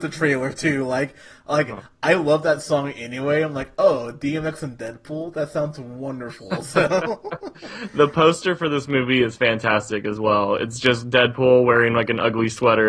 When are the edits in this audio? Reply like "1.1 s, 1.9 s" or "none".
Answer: none